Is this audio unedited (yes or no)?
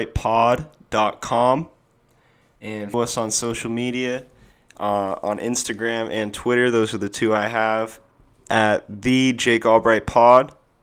no